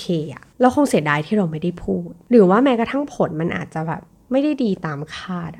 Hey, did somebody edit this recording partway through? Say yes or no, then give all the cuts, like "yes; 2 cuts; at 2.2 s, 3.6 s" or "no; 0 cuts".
no; 0 cuts